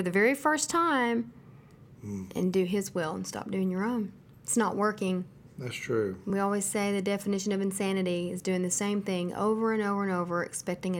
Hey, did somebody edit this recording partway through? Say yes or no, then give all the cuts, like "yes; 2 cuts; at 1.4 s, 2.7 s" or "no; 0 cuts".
no; 0 cuts